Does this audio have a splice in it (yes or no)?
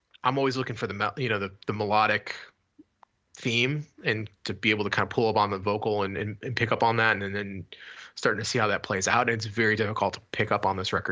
no